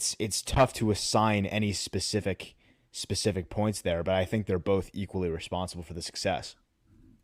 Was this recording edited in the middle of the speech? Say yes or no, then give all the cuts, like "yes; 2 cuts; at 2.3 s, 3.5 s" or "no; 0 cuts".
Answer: no; 0 cuts